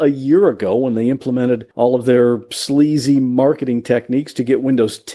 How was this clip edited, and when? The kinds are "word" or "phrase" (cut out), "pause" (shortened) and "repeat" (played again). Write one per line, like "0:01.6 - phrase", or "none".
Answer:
0:01.7 - pause